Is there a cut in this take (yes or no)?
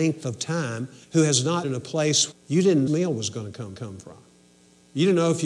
yes